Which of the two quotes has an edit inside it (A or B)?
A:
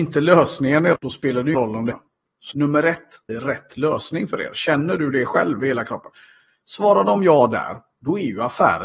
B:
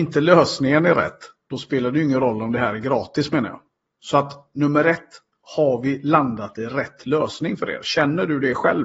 A